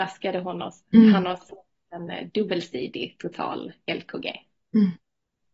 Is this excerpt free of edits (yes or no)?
yes